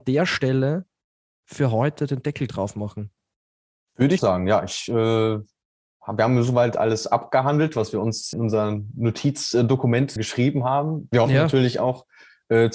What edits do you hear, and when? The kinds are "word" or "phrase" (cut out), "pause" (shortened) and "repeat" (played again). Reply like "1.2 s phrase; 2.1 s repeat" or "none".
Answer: 4.2 s word; 8.3 s word; 10.2 s word